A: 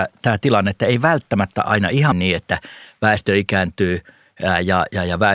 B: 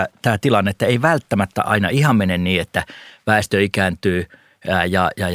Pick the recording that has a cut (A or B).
A